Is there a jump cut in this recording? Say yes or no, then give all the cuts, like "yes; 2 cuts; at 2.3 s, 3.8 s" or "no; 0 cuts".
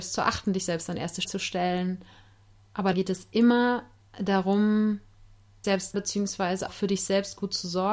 yes; 5 cuts; at 1.2 s, 2.9 s, 5.6 s, 5.9 s, 6.7 s